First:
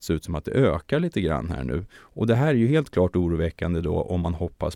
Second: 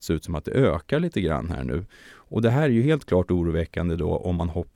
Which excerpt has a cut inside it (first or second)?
first